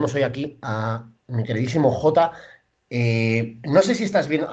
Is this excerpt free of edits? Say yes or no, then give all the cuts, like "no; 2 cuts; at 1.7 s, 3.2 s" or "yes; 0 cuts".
yes; 0 cuts